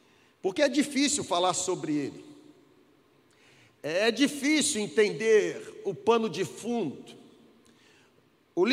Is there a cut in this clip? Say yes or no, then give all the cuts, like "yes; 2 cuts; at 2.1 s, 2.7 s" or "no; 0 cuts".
no; 0 cuts